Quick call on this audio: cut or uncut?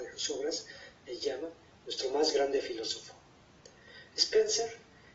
uncut